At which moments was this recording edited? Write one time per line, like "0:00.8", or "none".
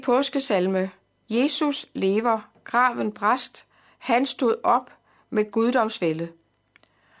none